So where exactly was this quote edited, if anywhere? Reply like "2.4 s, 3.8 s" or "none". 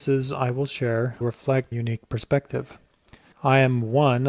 1.2 s, 1.7 s, 3.3 s